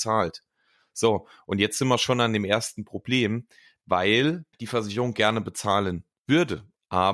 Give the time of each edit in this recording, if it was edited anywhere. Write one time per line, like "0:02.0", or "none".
0:04.5